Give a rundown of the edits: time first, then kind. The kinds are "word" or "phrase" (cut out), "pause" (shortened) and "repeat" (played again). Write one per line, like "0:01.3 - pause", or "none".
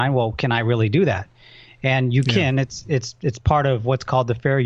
none